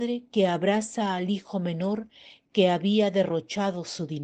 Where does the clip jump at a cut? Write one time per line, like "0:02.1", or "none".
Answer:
none